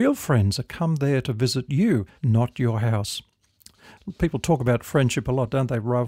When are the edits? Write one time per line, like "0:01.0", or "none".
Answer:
0:02.1